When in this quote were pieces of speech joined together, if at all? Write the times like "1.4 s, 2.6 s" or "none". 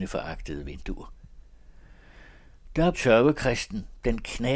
2.9 s